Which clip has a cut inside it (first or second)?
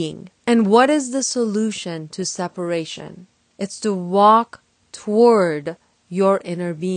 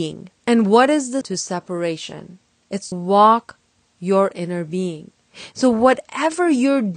second